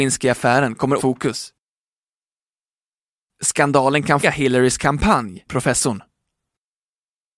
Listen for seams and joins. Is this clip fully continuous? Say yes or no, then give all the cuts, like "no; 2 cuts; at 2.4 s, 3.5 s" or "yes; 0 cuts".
no; 3 cuts; at 1.0 s, 4.2 s, 5.5 s